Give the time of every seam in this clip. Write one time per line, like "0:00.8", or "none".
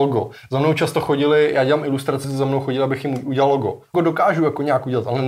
0:02.2
0:03.9